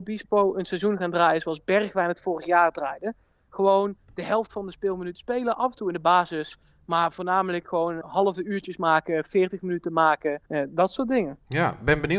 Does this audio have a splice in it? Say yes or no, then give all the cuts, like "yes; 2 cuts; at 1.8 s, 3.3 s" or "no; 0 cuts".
yes; 2 cuts; at 8.0 s, 10.5 s